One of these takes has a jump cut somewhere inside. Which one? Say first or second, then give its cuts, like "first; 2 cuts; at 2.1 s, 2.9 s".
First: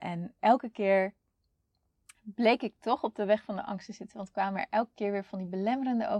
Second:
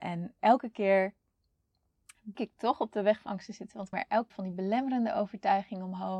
second; 4 cuts; at 2.3 s, 3.3 s, 3.9 s, 4.3 s